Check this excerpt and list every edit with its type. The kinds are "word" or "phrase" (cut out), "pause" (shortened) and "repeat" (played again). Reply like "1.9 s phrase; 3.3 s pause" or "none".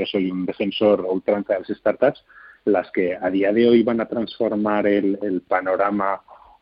1.0 s word